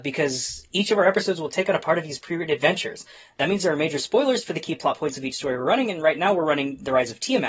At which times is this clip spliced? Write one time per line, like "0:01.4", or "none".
none